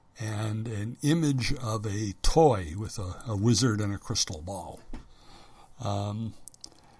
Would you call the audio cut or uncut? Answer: uncut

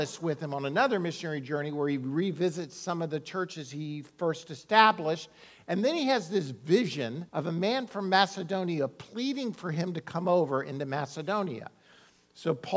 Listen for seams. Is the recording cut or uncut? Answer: cut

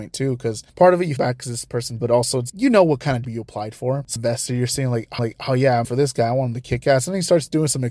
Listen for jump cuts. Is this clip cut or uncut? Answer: cut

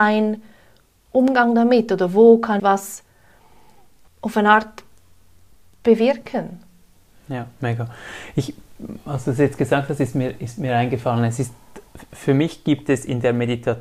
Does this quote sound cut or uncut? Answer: cut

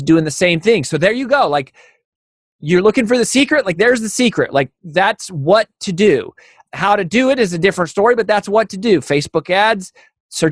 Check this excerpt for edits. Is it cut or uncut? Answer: uncut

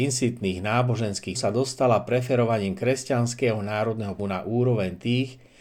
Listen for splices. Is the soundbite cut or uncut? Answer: cut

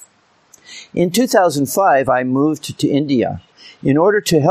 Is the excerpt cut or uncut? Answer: uncut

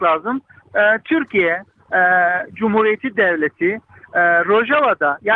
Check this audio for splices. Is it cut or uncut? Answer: uncut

